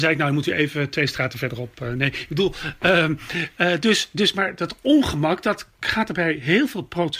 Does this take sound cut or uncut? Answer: uncut